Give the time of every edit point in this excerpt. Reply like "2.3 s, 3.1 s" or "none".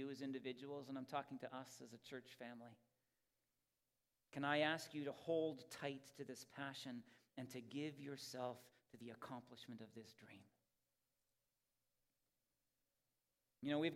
none